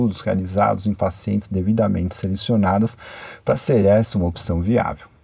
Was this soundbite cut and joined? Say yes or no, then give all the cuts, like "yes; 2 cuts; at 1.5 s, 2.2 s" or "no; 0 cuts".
no; 0 cuts